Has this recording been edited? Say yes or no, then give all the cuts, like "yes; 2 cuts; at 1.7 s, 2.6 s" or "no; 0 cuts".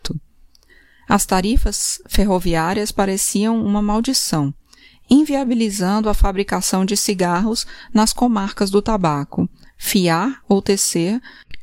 no; 0 cuts